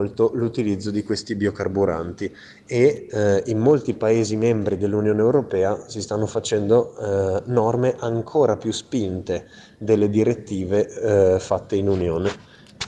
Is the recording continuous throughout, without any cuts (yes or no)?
yes